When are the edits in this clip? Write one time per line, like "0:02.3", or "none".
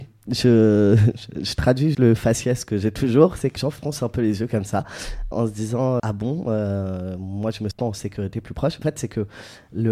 0:01.9
0:03.6
0:05.3
0:06.0
0:07.7
0:08.8